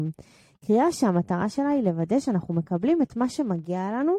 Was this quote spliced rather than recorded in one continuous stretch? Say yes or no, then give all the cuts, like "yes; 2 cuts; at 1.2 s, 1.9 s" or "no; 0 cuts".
no; 0 cuts